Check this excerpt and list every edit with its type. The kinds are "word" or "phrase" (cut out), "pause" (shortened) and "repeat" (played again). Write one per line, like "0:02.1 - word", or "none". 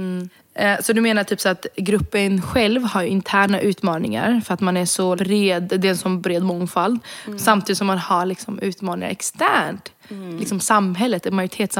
0:05.2 - word